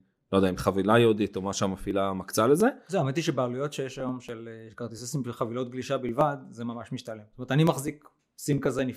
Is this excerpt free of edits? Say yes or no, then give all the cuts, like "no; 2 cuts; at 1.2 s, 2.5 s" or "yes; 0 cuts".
yes; 0 cuts